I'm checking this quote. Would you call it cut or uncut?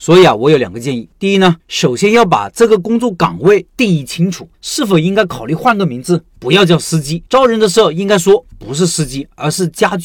cut